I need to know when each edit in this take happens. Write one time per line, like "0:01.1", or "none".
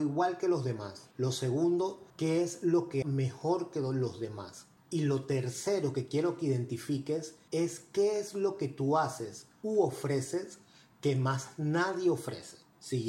0:01.1
0:02.1
0:03.0